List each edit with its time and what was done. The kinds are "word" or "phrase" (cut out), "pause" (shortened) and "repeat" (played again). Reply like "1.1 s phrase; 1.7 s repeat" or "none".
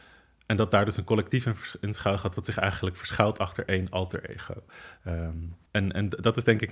5.7 s pause